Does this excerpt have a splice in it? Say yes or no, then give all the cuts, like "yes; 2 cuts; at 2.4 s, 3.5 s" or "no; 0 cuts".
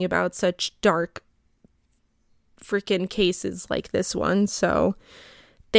no; 0 cuts